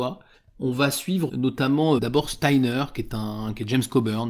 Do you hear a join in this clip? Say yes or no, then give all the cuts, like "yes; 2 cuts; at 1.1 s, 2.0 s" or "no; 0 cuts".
yes; 2 cuts; at 1.3 s, 2.0 s